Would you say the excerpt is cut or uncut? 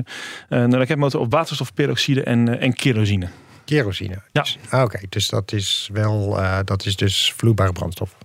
uncut